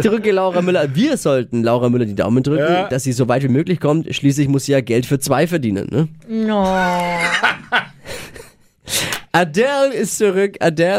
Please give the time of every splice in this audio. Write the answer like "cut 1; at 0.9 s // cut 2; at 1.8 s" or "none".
none